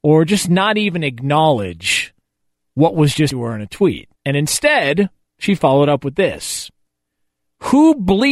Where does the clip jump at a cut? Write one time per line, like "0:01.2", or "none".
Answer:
0:03.3
0:04.1